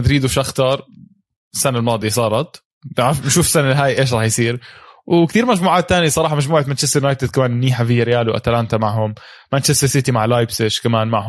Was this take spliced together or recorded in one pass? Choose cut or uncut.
uncut